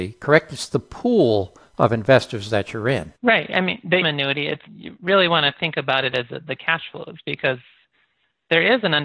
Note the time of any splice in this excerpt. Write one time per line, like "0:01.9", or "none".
0:03.2
0:04.0
0:04.7